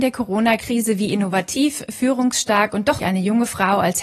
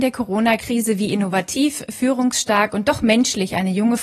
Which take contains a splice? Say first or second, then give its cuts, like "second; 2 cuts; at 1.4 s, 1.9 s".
first; 1 cut; at 3.0 s